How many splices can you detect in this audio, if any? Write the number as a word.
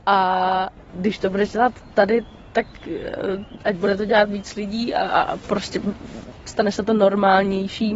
zero